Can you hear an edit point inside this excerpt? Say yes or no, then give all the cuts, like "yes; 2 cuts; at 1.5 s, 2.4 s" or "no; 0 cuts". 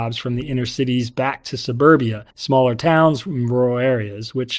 yes; 1 cut; at 2.3 s